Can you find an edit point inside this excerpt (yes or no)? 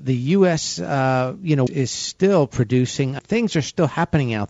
yes